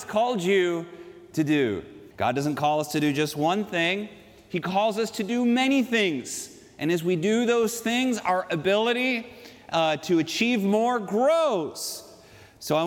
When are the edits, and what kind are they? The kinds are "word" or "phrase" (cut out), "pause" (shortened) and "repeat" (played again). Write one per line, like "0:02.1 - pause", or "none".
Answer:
0:02.1 - pause